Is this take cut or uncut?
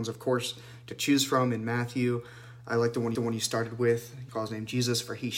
cut